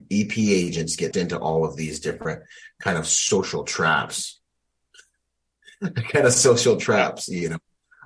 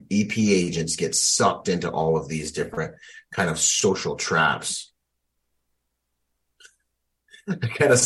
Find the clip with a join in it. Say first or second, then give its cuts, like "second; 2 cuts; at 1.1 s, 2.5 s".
first; 2 cuts; at 1.1 s, 4.5 s